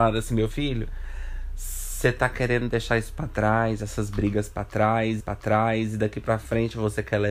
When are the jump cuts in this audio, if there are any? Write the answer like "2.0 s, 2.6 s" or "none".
5.2 s